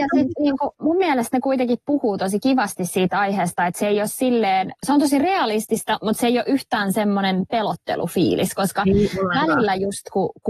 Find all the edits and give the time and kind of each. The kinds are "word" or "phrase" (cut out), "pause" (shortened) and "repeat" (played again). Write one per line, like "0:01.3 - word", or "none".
none